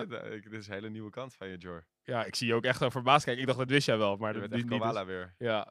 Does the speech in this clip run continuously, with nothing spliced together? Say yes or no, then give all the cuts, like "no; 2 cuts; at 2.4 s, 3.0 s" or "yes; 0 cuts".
yes; 0 cuts